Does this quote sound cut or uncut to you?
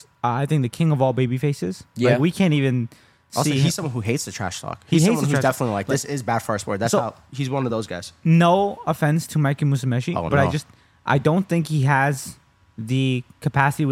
uncut